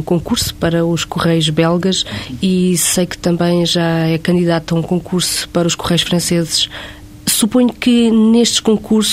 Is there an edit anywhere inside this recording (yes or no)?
no